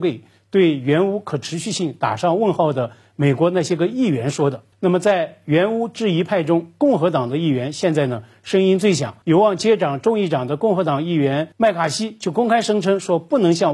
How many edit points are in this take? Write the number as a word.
three